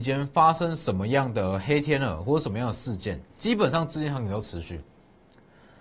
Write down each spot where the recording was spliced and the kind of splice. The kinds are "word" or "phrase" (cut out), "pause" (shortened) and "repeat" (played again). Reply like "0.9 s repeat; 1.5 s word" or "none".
3.3 s pause